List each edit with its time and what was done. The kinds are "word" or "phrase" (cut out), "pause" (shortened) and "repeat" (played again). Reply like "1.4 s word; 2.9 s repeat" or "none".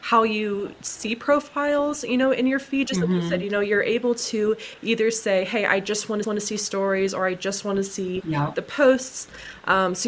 6.2 s repeat